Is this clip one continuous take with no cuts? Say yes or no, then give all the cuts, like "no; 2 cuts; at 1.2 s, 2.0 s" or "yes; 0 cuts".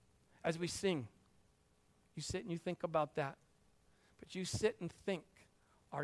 yes; 0 cuts